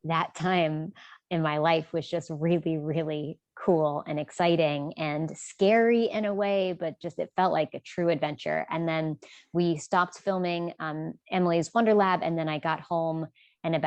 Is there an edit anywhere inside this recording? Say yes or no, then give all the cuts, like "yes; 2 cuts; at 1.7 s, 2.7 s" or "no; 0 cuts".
no; 0 cuts